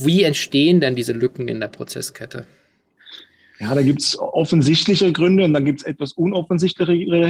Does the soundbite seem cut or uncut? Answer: uncut